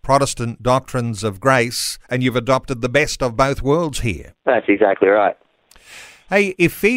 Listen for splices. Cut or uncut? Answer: cut